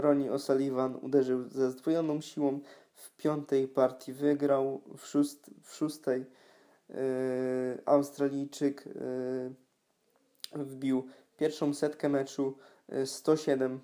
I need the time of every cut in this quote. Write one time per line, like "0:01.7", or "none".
none